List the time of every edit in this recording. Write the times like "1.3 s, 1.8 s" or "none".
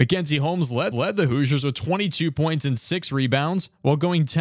0.9 s